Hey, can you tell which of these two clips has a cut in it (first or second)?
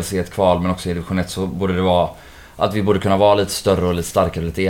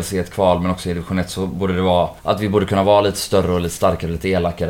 second